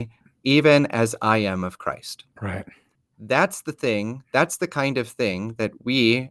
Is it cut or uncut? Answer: uncut